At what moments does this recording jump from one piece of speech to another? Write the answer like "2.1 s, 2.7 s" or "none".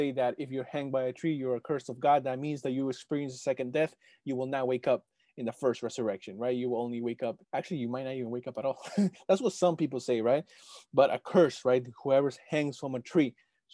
7.4 s